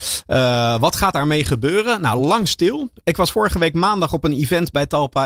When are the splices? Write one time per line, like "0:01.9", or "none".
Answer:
none